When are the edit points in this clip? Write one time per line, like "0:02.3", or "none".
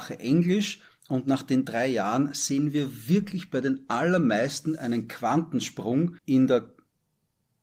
0:06.2